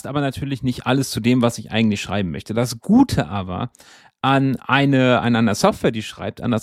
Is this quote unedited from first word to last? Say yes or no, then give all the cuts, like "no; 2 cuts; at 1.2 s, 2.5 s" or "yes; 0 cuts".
yes; 0 cuts